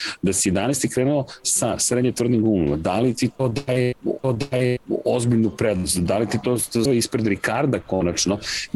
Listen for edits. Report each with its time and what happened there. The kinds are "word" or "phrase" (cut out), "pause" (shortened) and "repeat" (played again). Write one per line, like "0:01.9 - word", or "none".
0:04.2 - repeat
0:06.9 - word

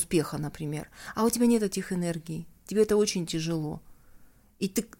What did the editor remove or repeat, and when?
none

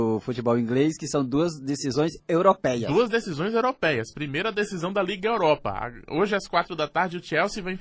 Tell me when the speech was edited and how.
none

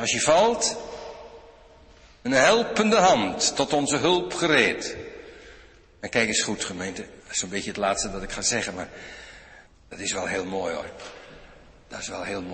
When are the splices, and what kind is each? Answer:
0:07.2 - pause
0:09.7 - pause

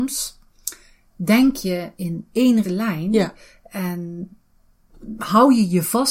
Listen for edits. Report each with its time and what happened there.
0:02.0 - word
0:02.6 - word

